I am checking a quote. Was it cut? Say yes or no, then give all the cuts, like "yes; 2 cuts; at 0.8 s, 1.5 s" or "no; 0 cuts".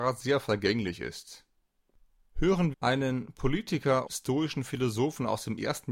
yes; 2 cuts; at 2.7 s, 4.1 s